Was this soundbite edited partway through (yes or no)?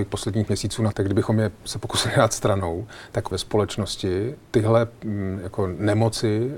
yes